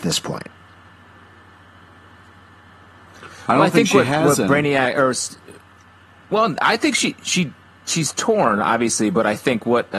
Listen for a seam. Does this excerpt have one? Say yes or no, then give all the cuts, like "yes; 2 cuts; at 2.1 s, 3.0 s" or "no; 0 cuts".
no; 0 cuts